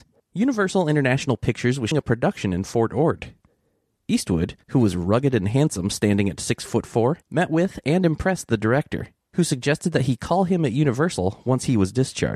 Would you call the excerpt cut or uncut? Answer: cut